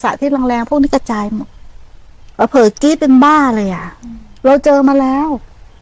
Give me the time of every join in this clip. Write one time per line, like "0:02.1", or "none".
none